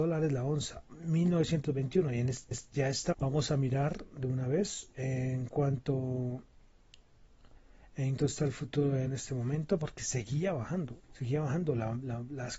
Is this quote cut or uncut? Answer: cut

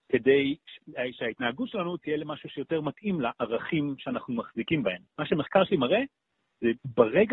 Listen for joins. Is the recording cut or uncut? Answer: cut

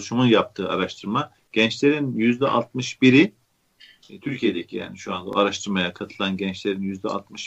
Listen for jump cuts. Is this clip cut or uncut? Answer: cut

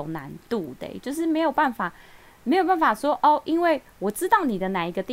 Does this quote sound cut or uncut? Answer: uncut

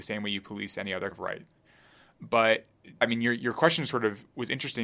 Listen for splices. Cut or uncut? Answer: cut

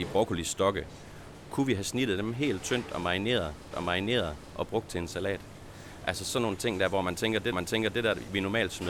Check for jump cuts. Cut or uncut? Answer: cut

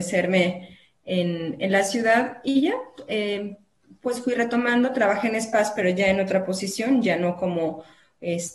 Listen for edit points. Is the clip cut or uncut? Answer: uncut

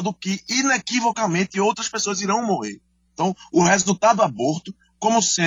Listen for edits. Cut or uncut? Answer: uncut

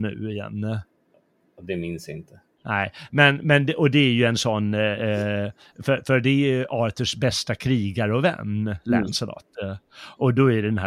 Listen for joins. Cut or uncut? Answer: uncut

